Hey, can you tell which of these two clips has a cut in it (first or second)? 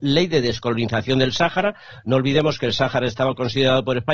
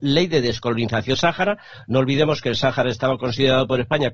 second